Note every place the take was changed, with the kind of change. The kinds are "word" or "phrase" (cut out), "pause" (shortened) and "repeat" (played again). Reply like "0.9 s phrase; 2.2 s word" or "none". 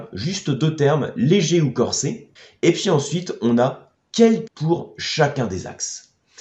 2.4 s pause; 4.5 s word